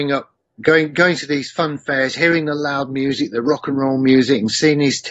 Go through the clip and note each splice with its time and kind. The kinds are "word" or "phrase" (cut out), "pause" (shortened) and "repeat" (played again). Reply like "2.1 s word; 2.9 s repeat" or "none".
none